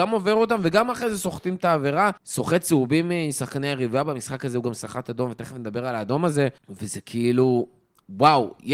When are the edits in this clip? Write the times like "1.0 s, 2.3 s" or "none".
2.2 s, 6.6 s